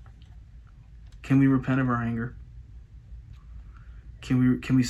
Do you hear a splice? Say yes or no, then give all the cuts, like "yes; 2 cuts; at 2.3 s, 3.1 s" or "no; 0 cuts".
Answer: no; 0 cuts